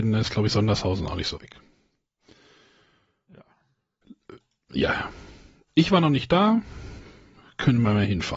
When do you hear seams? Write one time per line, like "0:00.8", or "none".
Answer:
0:01.4